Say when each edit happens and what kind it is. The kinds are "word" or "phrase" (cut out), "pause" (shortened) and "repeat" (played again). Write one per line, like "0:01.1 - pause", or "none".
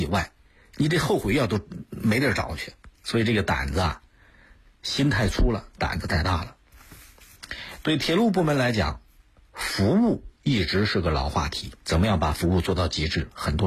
0:02.9 - pause
0:10.3 - pause
0:11.8 - pause